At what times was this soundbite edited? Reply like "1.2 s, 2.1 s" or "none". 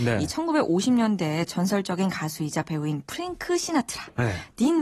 none